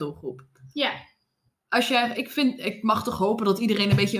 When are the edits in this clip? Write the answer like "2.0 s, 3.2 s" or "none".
none